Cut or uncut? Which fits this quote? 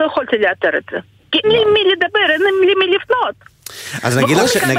cut